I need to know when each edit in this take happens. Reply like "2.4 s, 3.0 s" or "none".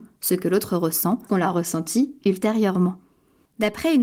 1.3 s